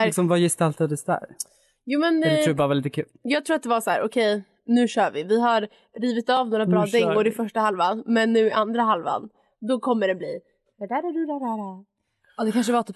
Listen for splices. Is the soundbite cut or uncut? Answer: uncut